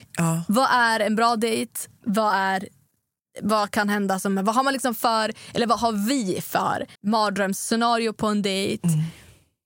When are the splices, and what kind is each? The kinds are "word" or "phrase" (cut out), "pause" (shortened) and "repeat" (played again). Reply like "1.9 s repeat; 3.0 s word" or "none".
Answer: 3.2 s pause; 7.0 s pause